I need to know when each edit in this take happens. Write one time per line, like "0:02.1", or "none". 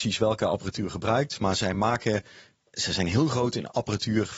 none

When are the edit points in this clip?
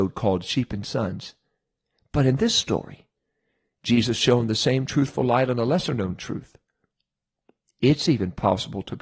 none

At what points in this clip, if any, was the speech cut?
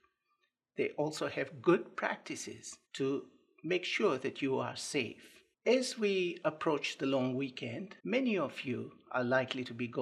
0:02.9
0:05.5
0:08.0

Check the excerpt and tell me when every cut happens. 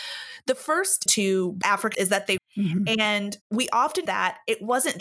0:01.1
0:01.9
0:02.4
0:03.4
0:04.1

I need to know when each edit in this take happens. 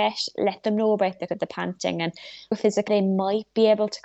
0:01.3
0:02.5
0:02.9

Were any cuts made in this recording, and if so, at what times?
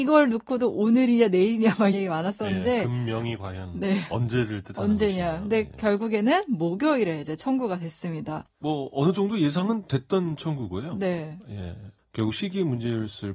0:01.9

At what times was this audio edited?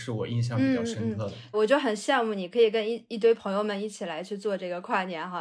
0:01.5

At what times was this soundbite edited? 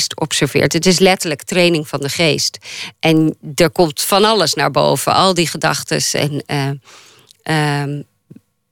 none

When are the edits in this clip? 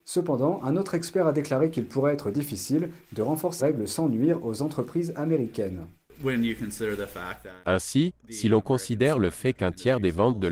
0:03.6
0:08.2

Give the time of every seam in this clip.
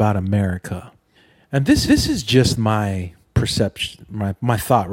0:01.1
0:01.9
0:03.2

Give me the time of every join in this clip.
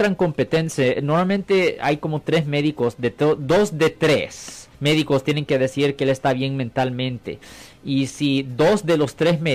0:04.7

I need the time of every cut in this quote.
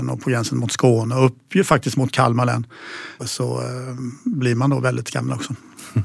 0:03.2

